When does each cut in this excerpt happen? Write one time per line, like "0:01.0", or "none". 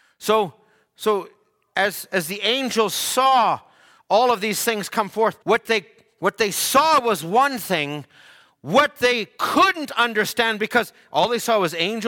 0:05.4